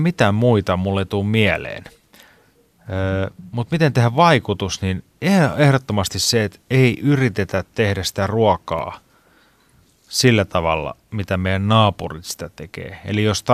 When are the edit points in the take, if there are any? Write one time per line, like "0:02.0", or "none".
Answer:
none